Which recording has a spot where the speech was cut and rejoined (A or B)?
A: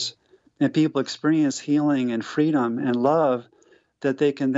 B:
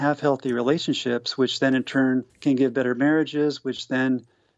B